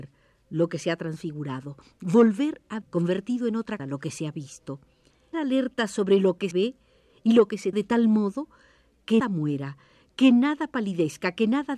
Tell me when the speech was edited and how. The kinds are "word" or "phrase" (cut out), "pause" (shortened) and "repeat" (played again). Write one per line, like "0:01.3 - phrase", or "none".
0:02.8 - word
0:03.8 - word
0:05.3 - word
0:06.5 - word
0:07.7 - word
0:09.2 - word